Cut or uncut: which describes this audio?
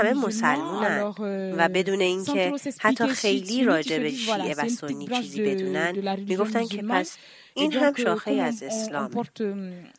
uncut